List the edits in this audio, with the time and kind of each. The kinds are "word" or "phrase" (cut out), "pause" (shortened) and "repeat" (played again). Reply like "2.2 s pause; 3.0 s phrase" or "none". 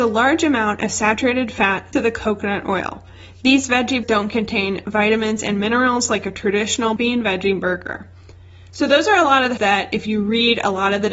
1.9 s word; 4.0 s word; 7.0 s word; 9.6 s word